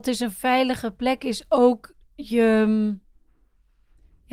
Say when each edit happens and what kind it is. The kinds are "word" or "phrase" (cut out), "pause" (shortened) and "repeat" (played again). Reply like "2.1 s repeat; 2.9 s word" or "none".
none